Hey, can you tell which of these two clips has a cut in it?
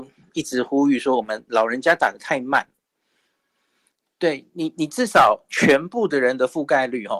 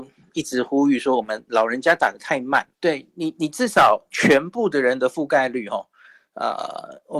second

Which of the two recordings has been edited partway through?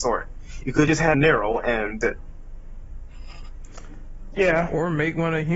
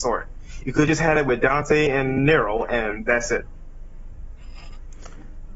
first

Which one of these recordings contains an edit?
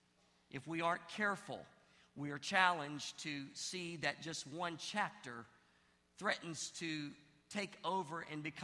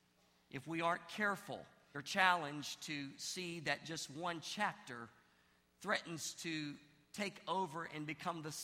second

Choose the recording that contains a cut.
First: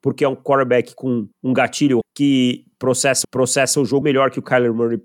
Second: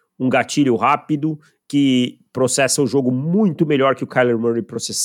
first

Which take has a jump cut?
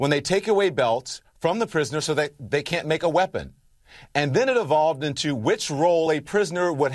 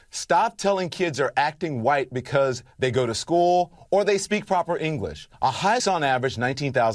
second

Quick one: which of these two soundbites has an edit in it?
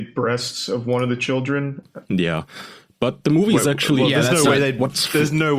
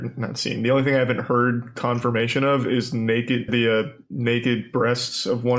second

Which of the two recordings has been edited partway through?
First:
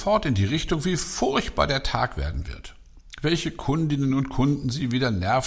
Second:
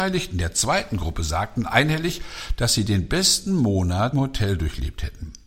second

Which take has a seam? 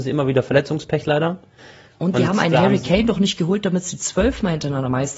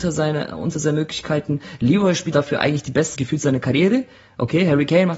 second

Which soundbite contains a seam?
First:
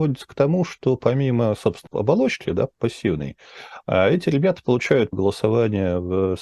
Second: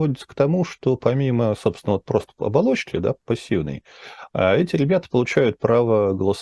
first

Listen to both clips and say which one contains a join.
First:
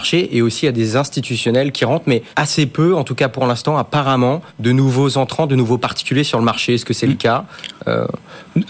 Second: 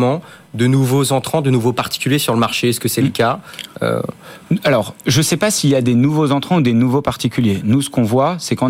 first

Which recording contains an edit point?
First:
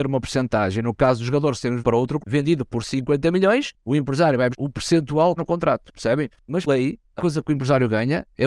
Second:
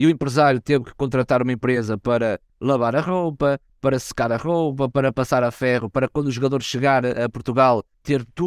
first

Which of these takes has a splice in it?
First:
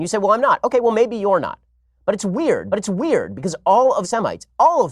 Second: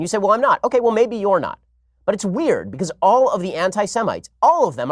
first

